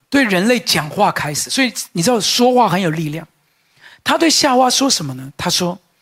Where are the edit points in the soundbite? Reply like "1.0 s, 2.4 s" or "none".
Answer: none